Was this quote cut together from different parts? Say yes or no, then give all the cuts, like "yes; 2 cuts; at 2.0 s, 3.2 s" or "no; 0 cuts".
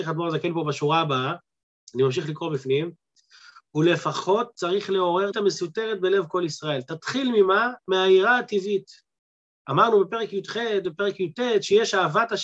yes; 1 cut; at 5.3 s